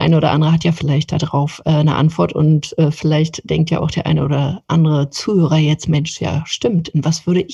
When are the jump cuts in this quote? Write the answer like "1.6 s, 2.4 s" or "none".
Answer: none